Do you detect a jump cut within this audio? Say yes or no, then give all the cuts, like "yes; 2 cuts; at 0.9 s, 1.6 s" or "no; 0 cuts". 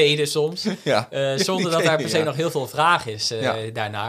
no; 0 cuts